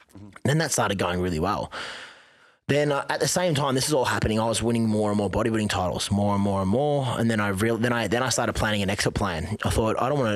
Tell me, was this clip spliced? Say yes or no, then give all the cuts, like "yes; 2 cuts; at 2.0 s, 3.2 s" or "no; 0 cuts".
no; 0 cuts